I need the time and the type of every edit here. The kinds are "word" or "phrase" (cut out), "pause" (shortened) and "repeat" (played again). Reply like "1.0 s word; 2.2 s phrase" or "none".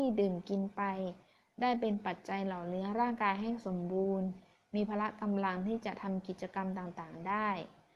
none